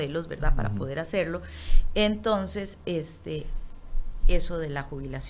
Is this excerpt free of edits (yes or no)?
no